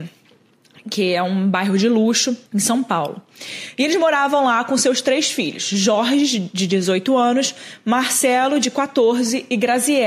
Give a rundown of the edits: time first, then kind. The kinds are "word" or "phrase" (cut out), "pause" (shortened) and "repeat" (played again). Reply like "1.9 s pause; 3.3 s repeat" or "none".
2.5 s pause